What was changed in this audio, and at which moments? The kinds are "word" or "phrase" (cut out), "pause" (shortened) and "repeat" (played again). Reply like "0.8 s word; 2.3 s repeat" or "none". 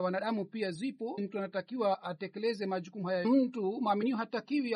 1.2 s word; 3.2 s phrase